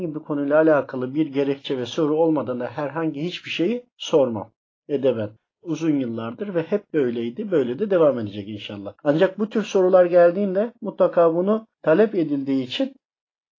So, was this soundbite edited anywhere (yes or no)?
yes